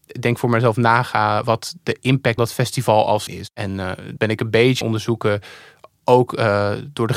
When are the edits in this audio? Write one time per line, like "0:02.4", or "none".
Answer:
0:01.4
0:02.4
0:03.3
0:04.2
0:04.8